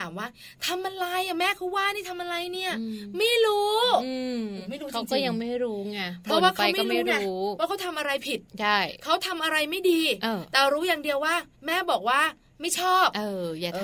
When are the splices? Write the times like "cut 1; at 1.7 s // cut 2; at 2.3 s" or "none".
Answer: cut 1; at 11.5 s